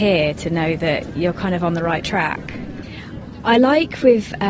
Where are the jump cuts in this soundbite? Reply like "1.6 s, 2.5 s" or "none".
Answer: none